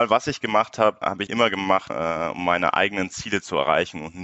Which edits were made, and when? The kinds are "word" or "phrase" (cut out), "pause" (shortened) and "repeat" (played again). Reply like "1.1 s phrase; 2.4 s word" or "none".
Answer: 1.3 s word; 1.9 s word